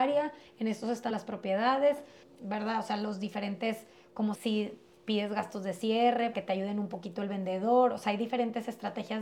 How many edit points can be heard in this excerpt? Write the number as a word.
four